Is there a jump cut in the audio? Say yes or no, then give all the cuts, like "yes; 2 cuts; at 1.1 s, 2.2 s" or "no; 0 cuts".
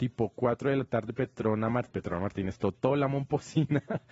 yes; 1 cut; at 1.9 s